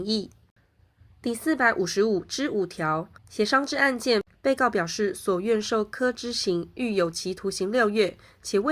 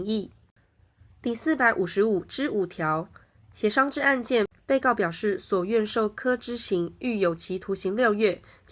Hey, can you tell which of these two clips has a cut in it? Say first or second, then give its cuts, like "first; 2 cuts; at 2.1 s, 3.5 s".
first; 1 cut; at 3.2 s